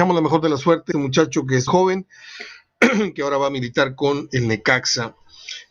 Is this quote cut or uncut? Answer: cut